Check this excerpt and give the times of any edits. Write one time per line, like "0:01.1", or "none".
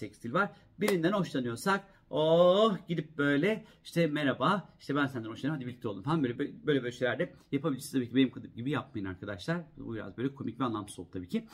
0:06.4